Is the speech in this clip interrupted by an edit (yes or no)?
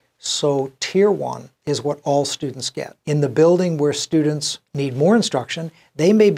yes